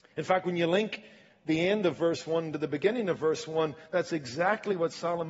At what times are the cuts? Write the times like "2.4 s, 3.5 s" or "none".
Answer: none